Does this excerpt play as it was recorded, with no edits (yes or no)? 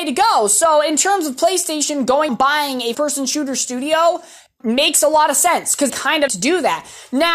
no